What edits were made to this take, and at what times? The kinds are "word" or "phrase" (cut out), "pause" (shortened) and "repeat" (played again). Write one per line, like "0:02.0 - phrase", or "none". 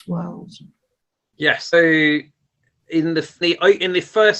0:01.7 - word
0:03.4 - word